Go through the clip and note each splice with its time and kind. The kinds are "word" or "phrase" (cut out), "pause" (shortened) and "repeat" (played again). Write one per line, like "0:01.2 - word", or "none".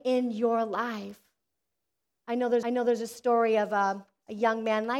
0:02.6 - repeat